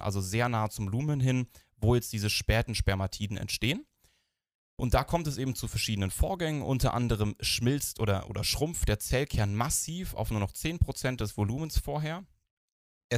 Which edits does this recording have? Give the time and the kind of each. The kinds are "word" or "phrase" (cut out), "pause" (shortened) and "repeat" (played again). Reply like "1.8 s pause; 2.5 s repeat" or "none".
none